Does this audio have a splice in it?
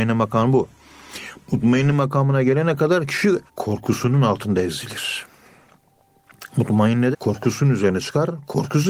yes; 2 cuts; at 3.5 s, 7.1 s

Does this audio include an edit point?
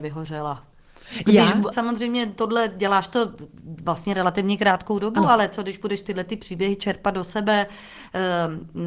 yes; 1 cut; at 1.7 s

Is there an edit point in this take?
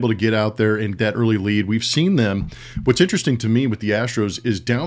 yes; 1 cut; at 1.0 s

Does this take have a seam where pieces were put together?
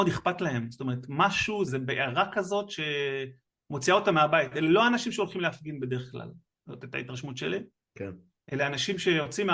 yes; 1 cut; at 1.7 s

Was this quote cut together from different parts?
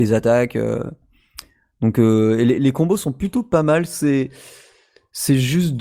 no; 0 cuts

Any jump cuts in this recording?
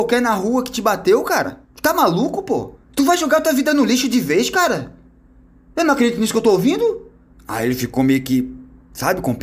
yes; 3 cuts; at 1.6 s, 2.8 s, 7.3 s

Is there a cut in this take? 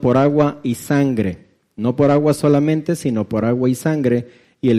no; 0 cuts

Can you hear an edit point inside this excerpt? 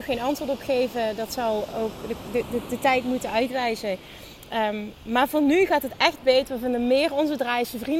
no; 0 cuts

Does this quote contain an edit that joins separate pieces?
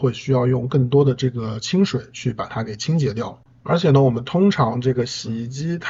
no; 0 cuts

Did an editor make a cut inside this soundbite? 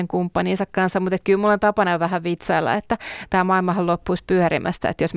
no; 0 cuts

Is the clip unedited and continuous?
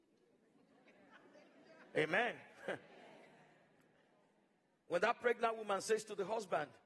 yes; 0 cuts

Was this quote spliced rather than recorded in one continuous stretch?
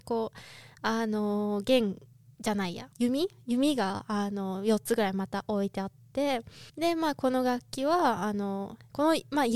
yes; 3 cuts; at 2.1 s, 2.9 s, 6.7 s

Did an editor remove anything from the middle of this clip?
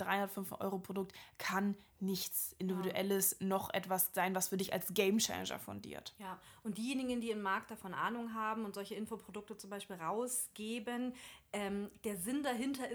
no; 0 cuts

